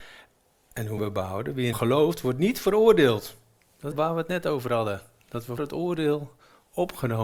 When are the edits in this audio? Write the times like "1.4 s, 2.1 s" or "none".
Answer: 1.0 s, 1.7 s, 3.9 s, 5.6 s